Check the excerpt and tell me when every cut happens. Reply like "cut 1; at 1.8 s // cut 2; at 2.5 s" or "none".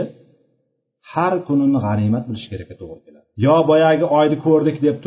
cut 1; at 3.3 s